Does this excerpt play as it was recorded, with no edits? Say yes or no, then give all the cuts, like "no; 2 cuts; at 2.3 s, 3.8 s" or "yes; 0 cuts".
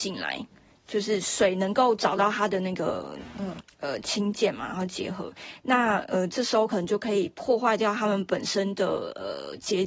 yes; 0 cuts